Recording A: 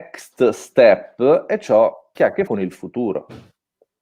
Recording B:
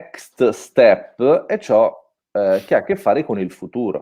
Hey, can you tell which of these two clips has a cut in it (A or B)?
A